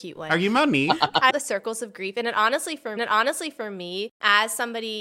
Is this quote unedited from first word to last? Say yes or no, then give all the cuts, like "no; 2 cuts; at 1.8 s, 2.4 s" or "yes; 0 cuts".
no; 2 cuts; at 1.3 s, 3.0 s